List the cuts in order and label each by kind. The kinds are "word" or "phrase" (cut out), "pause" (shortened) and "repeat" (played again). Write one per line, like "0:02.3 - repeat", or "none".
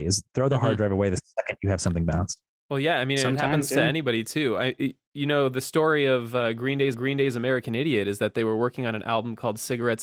0:06.9 - repeat